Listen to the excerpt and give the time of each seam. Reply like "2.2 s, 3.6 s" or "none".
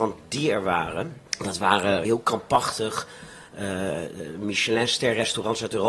1.3 s, 2.0 s